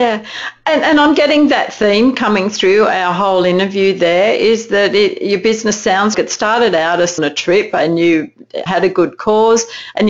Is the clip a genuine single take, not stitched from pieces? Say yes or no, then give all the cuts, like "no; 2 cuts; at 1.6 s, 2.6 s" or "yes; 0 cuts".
no; 3 cuts; at 6.1 s, 7.2 s, 8.7 s